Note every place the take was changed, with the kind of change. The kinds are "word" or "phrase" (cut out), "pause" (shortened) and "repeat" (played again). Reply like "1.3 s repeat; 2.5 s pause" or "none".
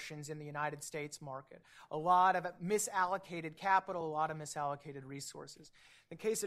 none